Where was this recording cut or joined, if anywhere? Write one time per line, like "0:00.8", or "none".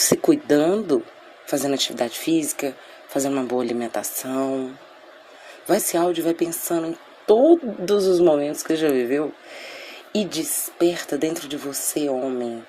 0:05.8
0:08.7